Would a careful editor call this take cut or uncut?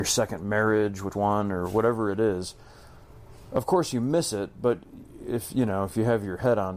cut